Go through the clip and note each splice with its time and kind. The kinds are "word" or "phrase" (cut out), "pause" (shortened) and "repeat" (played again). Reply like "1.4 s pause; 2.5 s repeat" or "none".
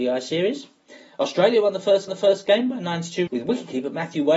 2.1 s repeat; 3.3 s word